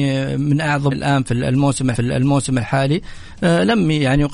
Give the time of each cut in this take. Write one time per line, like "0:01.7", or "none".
0:00.9
0:01.9